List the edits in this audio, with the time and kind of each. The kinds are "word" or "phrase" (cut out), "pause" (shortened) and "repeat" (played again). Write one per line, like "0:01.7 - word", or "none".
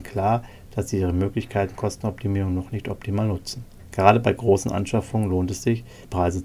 0:01.8 - word